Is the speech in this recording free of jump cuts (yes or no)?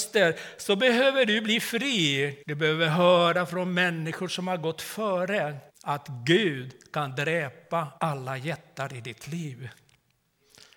no